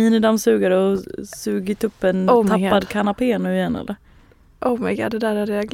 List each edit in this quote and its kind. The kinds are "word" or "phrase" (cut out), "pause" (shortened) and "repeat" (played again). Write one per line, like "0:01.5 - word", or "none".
none